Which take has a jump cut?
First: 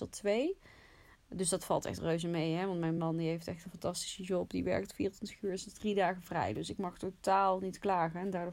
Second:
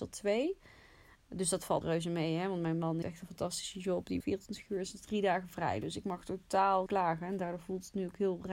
second; 4 cuts; at 1.8 s, 3.0 s, 4.2 s, 6.9 s

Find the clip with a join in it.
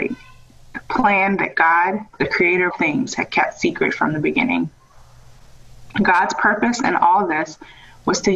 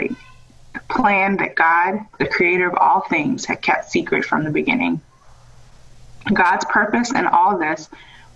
first; 1 cut; at 2.7 s

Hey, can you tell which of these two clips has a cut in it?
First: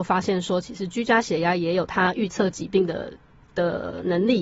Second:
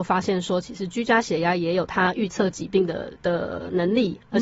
second; 1 cut; at 3.2 s

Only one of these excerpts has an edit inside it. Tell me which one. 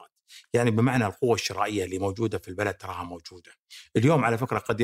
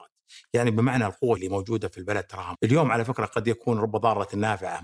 second; 2 cuts; at 1.4 s, 2.5 s

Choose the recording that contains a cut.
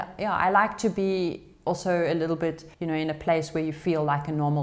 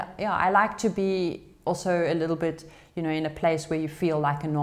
first; 1 cut; at 2.7 s

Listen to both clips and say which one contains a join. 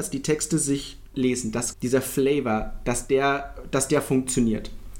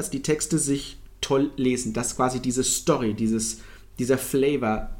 first; 2 cuts; at 1.1 s, 1.7 s

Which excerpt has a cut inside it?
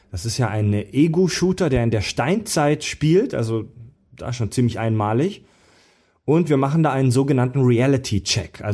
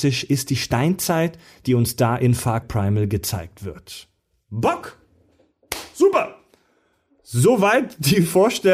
second; 1 cut; at 2.6 s

